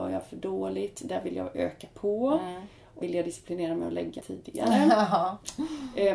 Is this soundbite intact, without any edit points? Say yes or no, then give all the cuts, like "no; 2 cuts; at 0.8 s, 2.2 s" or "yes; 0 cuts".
no; 2 cuts; at 3.0 s, 4.2 s